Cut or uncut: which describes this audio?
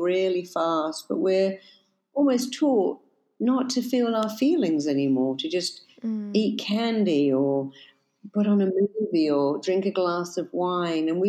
uncut